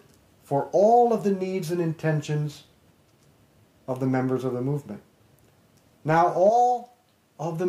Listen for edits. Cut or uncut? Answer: uncut